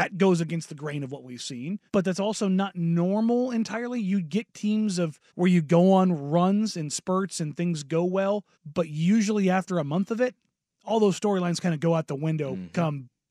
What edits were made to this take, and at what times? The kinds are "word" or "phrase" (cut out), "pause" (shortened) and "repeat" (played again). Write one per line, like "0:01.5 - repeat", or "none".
0:01.9 - pause
0:05.3 - pause
0:08.5 - pause
0:10.5 - pause